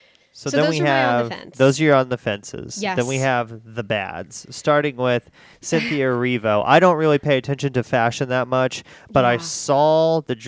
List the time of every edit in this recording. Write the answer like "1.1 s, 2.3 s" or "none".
none